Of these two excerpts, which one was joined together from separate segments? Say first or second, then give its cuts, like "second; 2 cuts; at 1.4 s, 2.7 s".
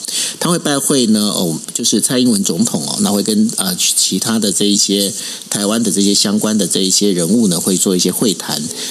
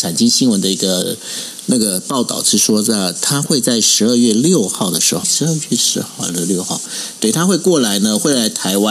second; 1 cut; at 5.2 s